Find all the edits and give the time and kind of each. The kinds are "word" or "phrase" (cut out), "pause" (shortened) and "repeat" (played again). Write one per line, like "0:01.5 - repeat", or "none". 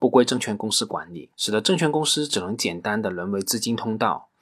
0:01.3 - pause